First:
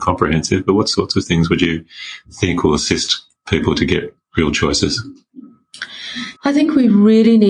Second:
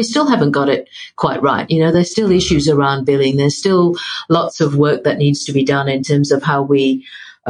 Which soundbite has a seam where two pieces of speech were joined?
first; 1 cut; at 6.4 s

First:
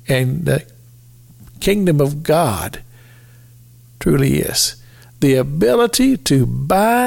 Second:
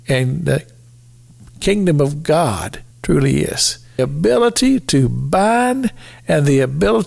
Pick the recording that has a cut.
second; 2 cuts; at 2.9 s, 4.0 s

